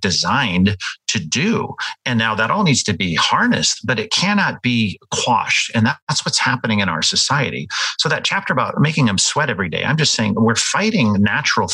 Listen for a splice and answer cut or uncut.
uncut